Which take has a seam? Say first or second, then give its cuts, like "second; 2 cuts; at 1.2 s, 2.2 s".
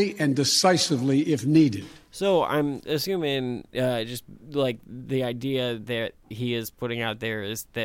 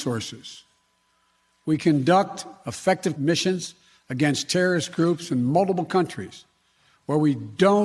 second; 1 cut; at 3.2 s